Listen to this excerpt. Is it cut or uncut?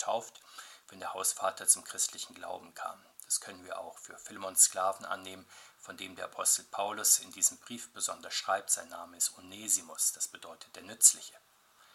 uncut